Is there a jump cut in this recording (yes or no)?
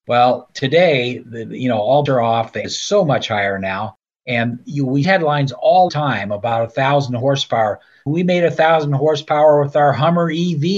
yes